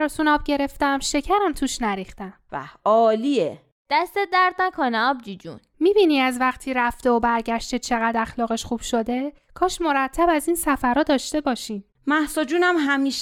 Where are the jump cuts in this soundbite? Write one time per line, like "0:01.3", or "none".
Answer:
0:02.5